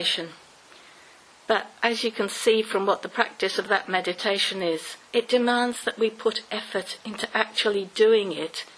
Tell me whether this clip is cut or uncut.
cut